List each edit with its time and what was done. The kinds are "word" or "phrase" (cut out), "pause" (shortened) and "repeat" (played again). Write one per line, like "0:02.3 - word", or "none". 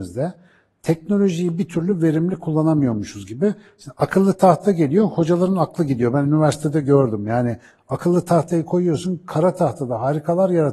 none